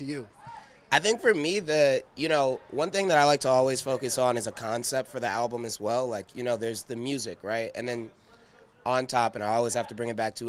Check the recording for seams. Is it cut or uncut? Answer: uncut